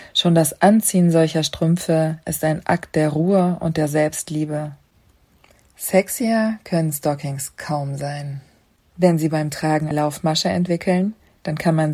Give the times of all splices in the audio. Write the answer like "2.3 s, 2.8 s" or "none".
9.9 s